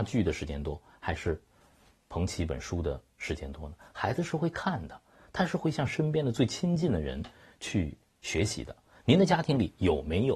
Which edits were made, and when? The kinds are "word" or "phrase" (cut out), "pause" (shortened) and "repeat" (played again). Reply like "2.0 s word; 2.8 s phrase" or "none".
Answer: none

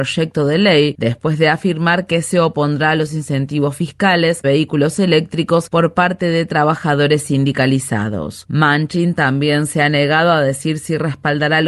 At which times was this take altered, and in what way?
4.4 s phrase

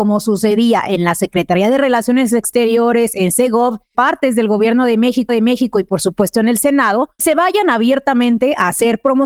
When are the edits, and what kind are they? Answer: 3.9 s word; 5.3 s repeat; 7.2 s word

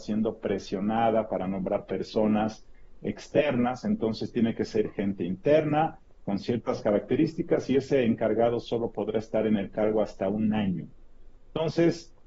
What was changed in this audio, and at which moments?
none

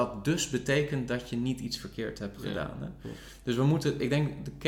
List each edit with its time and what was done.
none

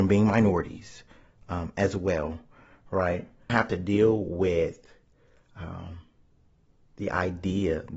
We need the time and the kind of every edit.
3.5 s word

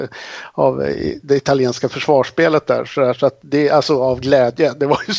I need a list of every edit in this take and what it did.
none

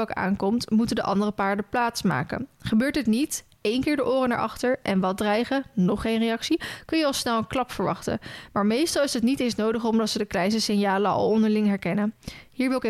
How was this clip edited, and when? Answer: none

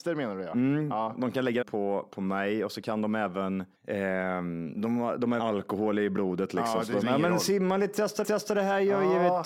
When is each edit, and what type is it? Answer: 1.6 s phrase; 3.7 s pause; 4.8 s word; 5.4 s word; 7.0 s word; 8.2 s repeat

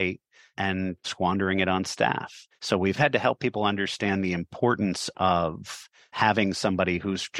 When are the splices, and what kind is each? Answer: none

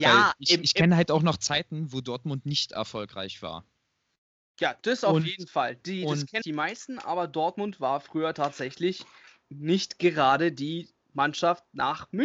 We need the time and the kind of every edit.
4.8 s word; 6.4 s phrase; 9.4 s word

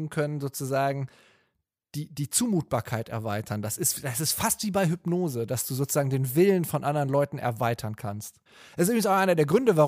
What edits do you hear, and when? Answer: none

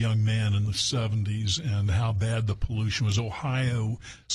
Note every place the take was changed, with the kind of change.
none

